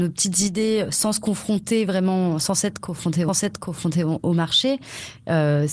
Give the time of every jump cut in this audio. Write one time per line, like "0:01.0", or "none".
0:03.3